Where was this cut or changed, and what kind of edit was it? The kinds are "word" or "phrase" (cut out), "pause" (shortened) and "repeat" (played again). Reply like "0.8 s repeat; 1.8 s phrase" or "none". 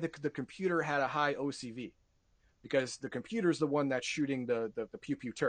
none